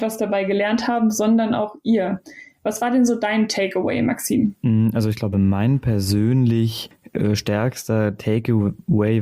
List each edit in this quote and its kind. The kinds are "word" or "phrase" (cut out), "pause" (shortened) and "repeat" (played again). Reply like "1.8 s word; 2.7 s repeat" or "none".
none